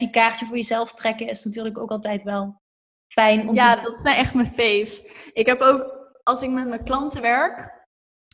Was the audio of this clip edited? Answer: no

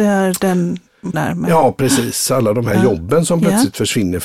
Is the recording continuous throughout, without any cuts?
no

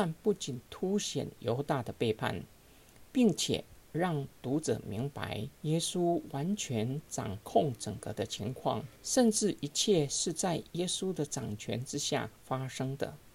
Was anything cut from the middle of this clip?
yes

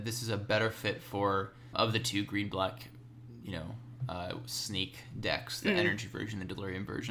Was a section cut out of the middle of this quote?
yes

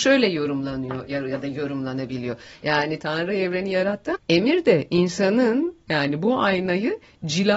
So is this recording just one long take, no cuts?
no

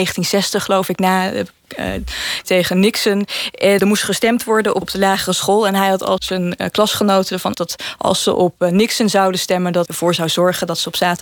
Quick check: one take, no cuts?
no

